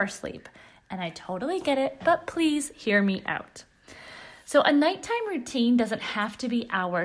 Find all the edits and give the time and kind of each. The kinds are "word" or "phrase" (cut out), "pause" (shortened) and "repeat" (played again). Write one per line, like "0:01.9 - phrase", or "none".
none